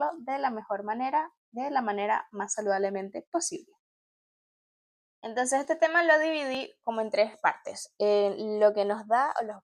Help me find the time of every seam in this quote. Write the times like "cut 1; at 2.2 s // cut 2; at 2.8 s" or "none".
none